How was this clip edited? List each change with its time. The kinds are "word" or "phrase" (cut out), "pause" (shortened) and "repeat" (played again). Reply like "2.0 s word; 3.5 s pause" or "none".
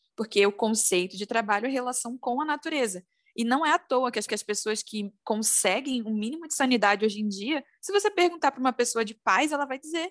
4.3 s repeat